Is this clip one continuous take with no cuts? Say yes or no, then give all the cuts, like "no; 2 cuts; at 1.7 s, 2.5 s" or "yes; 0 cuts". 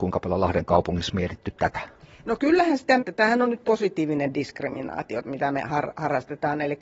no; 2 cuts; at 3.0 s, 3.6 s